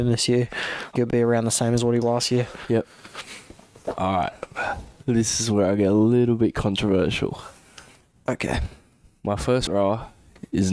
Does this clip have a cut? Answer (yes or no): yes